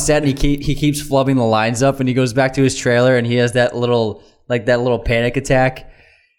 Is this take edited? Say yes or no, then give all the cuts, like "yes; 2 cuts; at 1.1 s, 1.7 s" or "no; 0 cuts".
no; 0 cuts